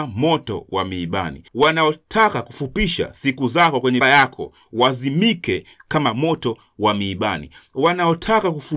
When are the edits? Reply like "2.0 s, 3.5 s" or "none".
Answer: 1.5 s, 4.0 s